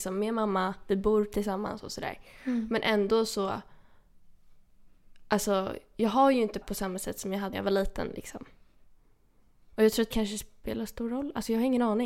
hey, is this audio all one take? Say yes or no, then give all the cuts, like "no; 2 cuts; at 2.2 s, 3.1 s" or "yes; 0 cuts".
no; 3 cuts; at 6.6 s, 7.5 s, 10.1 s